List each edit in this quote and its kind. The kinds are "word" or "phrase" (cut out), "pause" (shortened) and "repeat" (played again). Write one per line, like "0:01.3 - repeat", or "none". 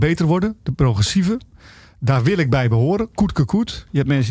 none